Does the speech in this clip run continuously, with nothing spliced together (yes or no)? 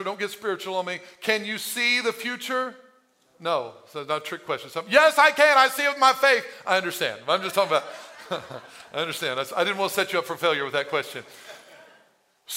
yes